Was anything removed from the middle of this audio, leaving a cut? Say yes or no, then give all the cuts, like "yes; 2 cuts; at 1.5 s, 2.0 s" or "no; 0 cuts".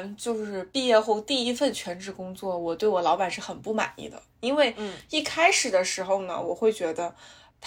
yes; 1 cut; at 4.3 s